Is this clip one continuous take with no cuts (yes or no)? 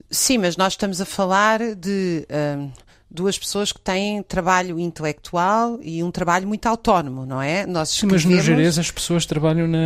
yes